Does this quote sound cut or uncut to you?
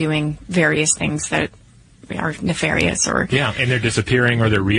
uncut